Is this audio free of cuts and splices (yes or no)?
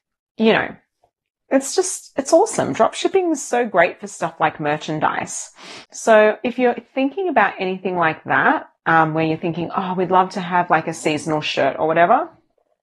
no